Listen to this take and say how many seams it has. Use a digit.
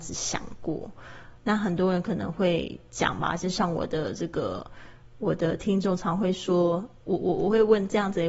1